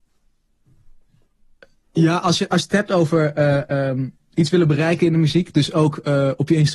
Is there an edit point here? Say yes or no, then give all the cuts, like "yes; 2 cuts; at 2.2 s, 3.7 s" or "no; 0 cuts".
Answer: no; 0 cuts